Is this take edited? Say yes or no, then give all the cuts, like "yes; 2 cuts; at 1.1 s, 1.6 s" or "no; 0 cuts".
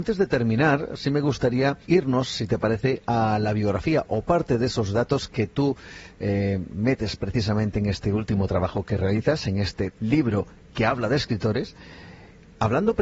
yes; 2 cuts; at 1.8 s, 9.9 s